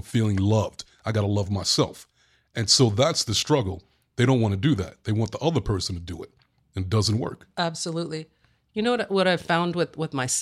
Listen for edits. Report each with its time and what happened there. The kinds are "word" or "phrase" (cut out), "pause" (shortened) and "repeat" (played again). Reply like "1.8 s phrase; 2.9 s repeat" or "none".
none